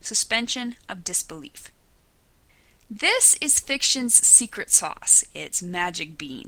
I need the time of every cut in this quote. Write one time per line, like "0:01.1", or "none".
none